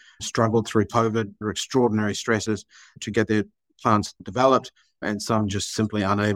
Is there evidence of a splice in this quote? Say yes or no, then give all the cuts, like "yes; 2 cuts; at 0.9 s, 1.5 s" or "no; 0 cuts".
no; 0 cuts